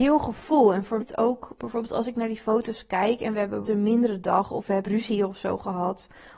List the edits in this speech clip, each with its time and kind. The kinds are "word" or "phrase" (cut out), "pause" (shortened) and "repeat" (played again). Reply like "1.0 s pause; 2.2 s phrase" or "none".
1.0 s phrase; 3.6 s word; 4.8 s phrase